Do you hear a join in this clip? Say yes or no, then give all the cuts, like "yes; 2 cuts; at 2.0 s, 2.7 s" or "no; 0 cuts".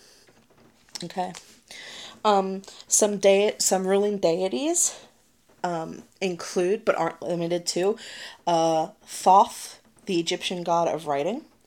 no; 0 cuts